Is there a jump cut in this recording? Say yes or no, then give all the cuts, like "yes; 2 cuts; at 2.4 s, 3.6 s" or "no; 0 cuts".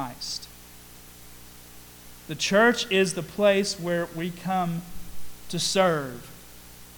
no; 0 cuts